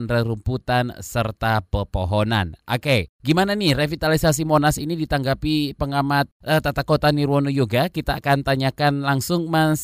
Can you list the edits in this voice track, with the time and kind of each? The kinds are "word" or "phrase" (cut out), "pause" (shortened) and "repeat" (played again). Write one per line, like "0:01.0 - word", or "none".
none